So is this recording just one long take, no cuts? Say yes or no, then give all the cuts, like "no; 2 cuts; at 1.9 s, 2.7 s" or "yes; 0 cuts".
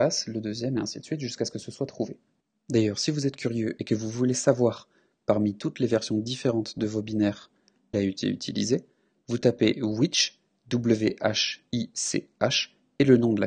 no; 1 cut; at 7.9 s